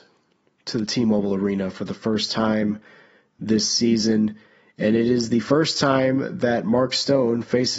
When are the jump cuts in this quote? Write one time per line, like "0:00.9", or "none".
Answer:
none